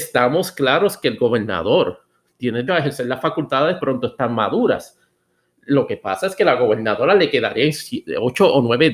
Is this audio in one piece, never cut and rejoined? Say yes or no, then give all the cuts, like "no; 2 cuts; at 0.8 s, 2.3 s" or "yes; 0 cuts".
no; 2 cuts; at 2.7 s, 3.8 s